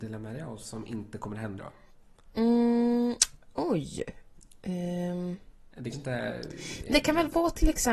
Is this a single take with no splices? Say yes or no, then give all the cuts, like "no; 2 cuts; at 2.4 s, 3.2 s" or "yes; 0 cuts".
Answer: no; 3 cuts; at 1.6 s, 5.9 s, 6.9 s